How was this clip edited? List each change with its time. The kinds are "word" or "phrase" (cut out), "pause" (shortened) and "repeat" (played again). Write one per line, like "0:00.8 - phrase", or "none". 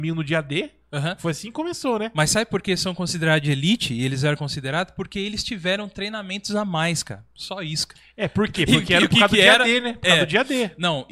none